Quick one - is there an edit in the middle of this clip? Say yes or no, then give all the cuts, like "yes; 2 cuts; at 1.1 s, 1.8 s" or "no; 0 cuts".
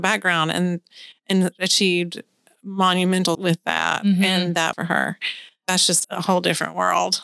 yes; 3 cuts; at 3.3 s, 4.7 s, 6.0 s